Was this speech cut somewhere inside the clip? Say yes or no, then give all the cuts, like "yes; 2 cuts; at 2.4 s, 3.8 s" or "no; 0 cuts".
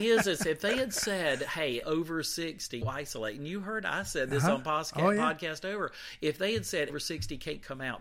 yes; 3 cuts; at 1.8 s, 2.8 s, 6.9 s